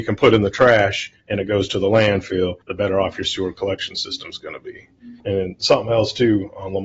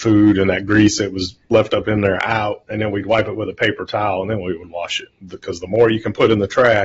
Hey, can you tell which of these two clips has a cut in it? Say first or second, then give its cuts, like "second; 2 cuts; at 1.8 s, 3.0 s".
first; 3 cuts; at 1.2 s, 2.6 s, 5.2 s